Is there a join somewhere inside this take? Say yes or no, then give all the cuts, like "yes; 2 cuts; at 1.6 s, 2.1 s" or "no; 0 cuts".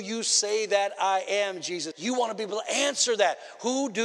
yes; 1 cut; at 1.9 s